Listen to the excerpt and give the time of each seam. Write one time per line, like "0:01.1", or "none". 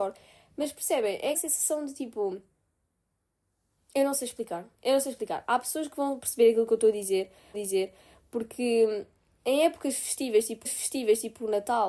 0:01.3
0:04.7
0:07.5
0:10.6